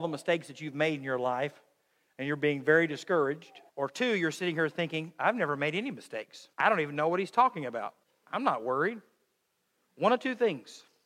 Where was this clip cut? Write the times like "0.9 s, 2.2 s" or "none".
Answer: 3.7 s, 6.5 s, 8.0 s